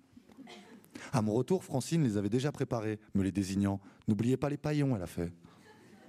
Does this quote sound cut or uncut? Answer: uncut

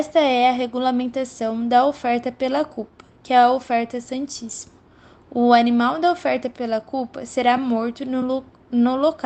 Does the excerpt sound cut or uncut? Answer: uncut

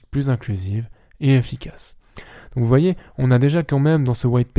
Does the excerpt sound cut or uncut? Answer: uncut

